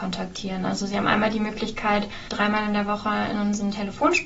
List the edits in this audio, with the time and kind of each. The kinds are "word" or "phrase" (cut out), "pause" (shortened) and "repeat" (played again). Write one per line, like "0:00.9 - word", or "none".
0:02.3 - word